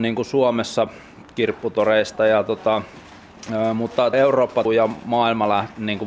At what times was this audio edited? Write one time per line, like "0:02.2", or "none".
0:04.1
0:04.7